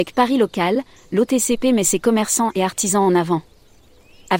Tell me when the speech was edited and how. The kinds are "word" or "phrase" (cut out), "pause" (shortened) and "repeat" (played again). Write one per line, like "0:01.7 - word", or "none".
none